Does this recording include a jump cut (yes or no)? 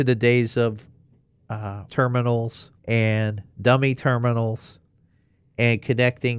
yes